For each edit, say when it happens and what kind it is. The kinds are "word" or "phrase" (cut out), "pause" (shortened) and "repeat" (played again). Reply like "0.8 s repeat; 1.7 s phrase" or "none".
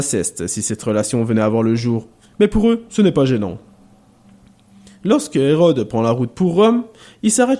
none